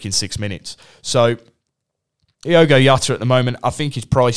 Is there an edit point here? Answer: no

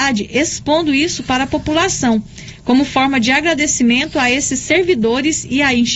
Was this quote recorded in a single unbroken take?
yes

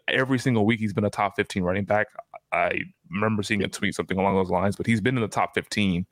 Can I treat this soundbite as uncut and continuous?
yes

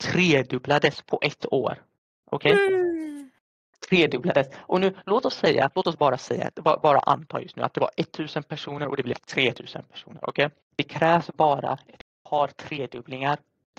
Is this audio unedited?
no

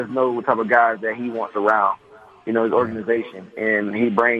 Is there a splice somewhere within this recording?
no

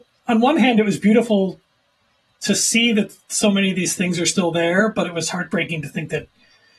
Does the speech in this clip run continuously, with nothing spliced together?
yes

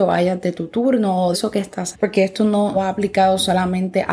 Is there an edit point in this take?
yes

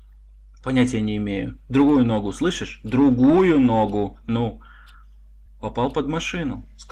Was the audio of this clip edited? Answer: no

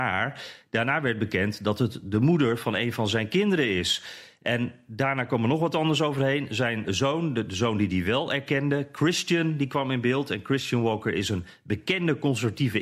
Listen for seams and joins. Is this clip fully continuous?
no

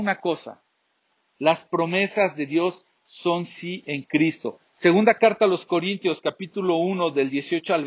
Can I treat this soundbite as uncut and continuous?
no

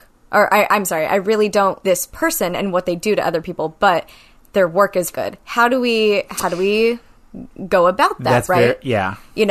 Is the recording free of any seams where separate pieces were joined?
no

